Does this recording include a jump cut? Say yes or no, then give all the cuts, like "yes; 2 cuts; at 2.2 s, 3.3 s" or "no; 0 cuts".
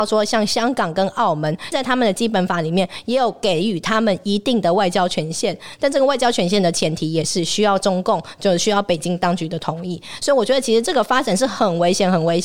yes; 1 cut; at 1.7 s